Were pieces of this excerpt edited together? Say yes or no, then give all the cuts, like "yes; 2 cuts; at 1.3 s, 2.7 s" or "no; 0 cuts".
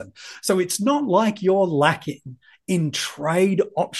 no; 0 cuts